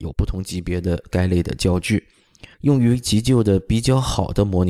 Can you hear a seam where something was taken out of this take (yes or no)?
yes